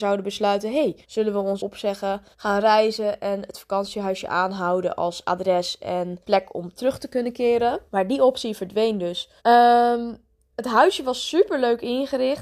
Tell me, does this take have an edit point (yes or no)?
yes